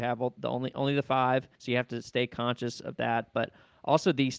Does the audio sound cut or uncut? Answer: cut